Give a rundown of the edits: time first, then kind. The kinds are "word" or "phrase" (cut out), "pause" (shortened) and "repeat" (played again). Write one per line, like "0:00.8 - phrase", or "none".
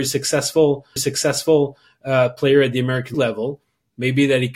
0:01.0 - repeat
0:03.1 - word